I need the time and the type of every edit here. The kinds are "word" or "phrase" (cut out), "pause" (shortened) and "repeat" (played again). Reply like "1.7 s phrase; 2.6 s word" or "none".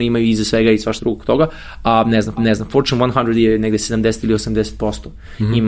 1.0 s word; 2.4 s repeat